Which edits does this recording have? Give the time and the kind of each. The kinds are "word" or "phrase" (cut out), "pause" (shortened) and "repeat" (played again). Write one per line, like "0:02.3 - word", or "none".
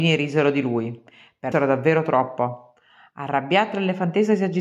0:01.5 - phrase